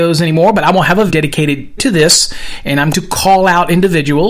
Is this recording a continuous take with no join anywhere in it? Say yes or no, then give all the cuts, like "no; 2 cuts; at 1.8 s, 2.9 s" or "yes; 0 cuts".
no; 3 cuts; at 1.1 s, 1.8 s, 2.9 s